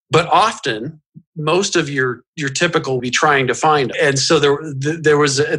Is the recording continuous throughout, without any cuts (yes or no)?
no